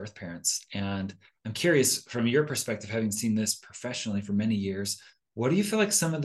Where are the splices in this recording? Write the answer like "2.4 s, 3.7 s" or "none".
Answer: none